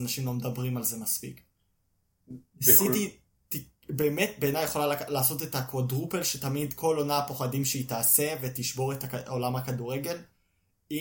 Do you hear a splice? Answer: no; 0 cuts

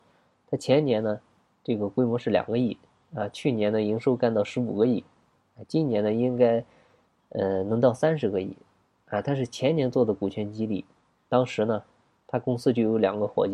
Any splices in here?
no; 0 cuts

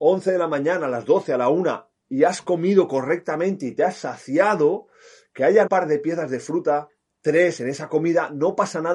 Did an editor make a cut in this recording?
yes; 1 cut; at 5.7 s

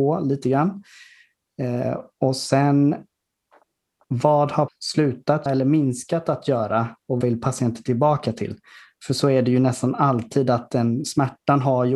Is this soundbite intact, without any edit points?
no; 3 cuts; at 4.7 s, 5.5 s, 7.2 s

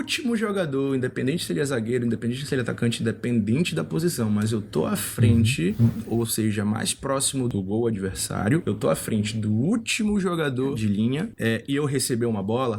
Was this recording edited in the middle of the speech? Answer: no; 0 cuts

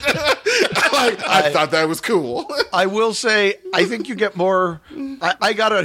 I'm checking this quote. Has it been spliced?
no; 0 cuts

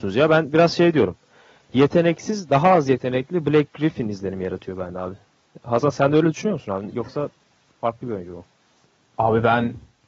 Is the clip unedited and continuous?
yes; 0 cuts

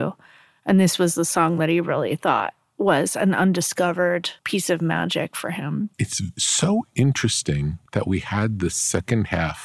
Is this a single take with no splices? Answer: no; 3 cuts; at 4.4 s, 5.9 s, 7.9 s

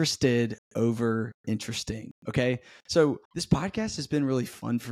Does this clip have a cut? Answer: yes; 1 cut; at 3.2 s

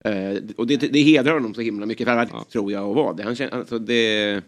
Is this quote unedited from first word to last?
no; 1 cut; at 2.3 s

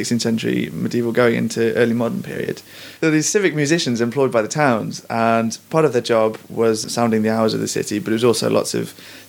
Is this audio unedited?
yes; 0 cuts

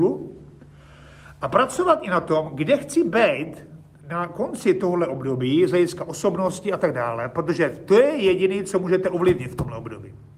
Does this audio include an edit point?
no; 0 cuts

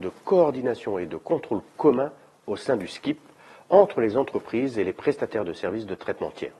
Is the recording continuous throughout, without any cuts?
yes; 0 cuts

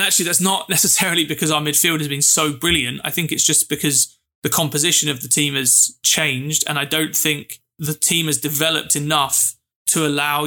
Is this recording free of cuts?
yes; 0 cuts

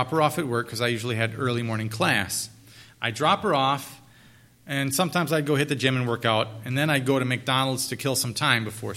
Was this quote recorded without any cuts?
yes; 0 cuts

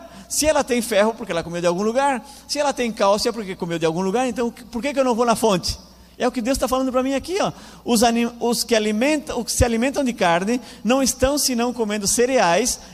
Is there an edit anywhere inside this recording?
no; 0 cuts

